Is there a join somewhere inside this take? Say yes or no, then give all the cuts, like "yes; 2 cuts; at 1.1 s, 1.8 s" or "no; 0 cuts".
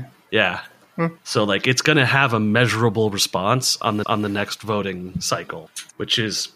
yes; 1 cut; at 4.0 s